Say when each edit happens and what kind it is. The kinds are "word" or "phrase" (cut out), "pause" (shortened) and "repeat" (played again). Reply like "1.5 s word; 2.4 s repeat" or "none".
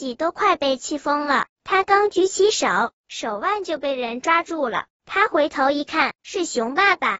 6.1 s word